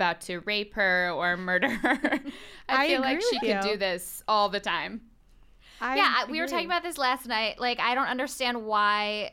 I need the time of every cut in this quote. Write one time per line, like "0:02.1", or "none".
none